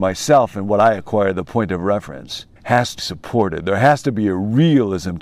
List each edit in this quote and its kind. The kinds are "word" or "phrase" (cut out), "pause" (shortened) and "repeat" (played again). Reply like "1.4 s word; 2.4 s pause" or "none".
2.6 s pause; 3.0 s word